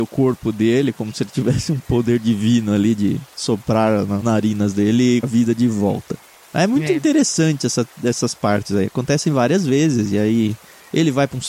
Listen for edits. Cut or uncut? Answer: cut